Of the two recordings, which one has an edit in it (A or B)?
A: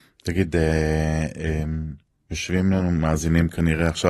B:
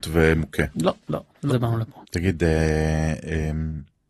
B